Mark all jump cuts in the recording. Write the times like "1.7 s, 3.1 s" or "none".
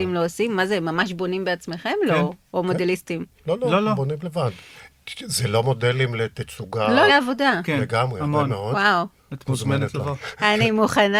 7.1 s